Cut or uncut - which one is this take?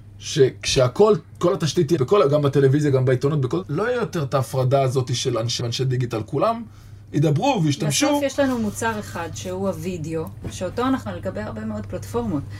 cut